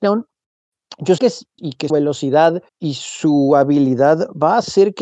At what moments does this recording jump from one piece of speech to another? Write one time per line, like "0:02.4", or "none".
0:01.2
0:01.6
0:01.9
0:02.7